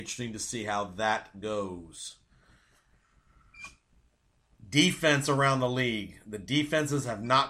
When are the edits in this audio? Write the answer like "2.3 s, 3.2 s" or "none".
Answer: none